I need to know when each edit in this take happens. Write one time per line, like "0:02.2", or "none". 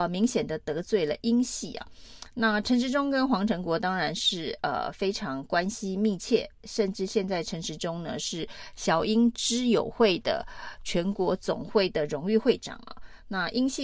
none